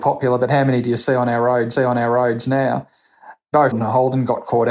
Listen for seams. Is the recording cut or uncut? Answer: cut